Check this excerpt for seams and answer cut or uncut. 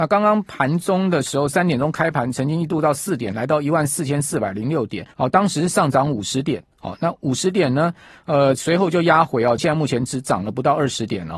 cut